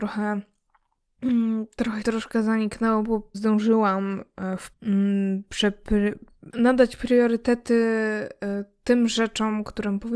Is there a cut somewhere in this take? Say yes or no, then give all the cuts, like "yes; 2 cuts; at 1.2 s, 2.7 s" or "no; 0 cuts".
yes; 4 cuts; at 2.0 s, 3.3 s, 4.7 s, 6.5 s